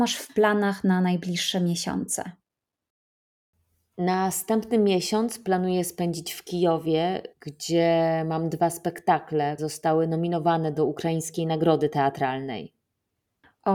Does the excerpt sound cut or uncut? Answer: cut